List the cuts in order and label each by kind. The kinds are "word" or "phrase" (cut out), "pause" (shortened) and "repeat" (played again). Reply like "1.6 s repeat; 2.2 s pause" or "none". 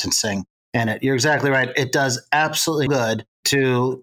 2.9 s word